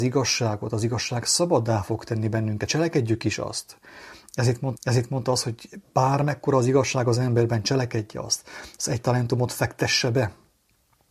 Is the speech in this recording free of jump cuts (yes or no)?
no